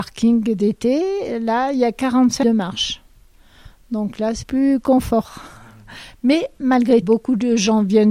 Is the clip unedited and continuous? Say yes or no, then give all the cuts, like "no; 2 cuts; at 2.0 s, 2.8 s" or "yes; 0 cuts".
no; 3 cuts; at 2.4 s, 4.4 s, 7.0 s